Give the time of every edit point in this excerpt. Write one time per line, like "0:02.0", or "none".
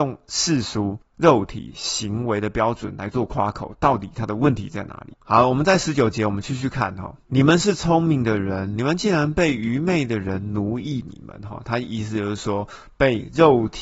0:05.2
0:07.2